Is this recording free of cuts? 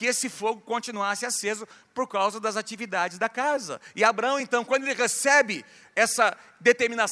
yes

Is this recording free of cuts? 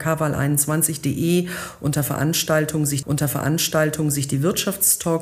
no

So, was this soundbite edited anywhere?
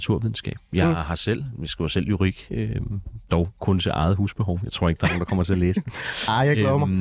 no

